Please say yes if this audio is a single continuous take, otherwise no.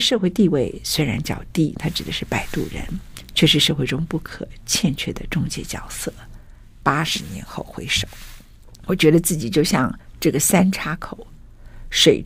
yes